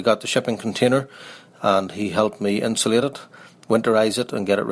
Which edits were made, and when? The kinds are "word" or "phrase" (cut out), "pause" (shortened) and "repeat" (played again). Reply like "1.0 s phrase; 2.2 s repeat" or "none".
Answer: none